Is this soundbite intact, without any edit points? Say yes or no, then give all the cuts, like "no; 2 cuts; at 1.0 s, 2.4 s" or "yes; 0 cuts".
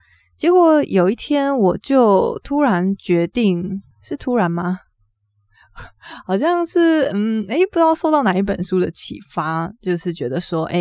no; 1 cut; at 3.9 s